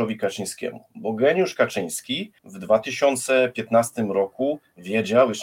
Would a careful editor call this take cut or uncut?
cut